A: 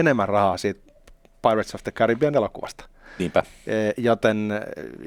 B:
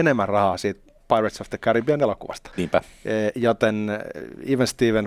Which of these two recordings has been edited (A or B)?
B